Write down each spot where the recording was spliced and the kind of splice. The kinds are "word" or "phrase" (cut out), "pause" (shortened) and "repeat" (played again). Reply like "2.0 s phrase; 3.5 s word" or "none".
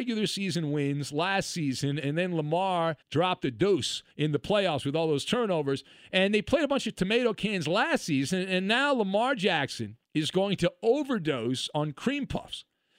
3.0 s pause; 4.1 s pause; 10.0 s pause